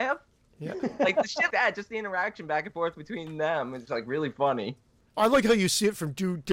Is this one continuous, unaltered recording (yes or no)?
no